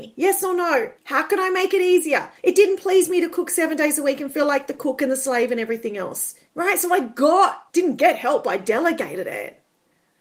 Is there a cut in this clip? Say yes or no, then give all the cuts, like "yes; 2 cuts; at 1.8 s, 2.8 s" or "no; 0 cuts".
yes; 4 cuts; at 1.0 s, 2.4 s, 6.5 s, 7.7 s